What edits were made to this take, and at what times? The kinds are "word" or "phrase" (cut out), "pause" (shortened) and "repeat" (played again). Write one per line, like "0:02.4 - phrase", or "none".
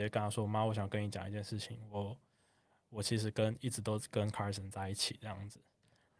none